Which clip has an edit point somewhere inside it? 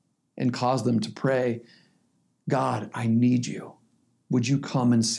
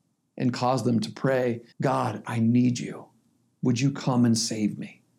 second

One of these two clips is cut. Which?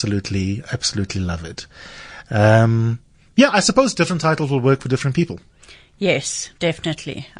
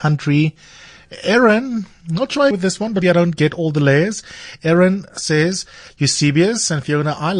second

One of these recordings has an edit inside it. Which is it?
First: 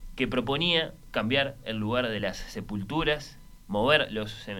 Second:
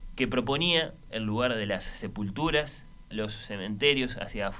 second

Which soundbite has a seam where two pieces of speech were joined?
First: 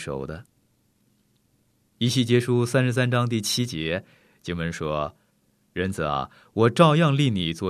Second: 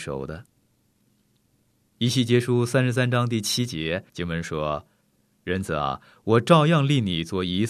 second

